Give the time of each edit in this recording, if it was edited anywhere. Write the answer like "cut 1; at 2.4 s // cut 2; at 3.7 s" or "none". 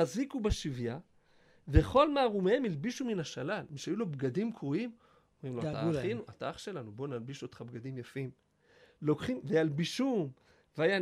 none